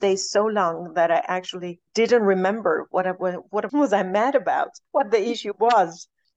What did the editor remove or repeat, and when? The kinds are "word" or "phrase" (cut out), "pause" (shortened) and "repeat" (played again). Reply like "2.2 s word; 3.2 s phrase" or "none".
1.9 s pause